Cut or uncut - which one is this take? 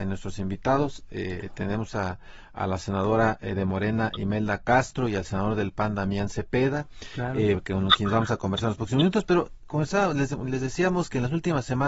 uncut